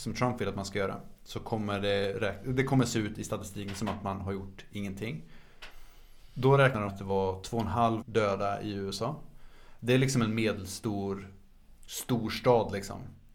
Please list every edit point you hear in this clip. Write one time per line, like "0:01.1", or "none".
0:06.9
0:08.0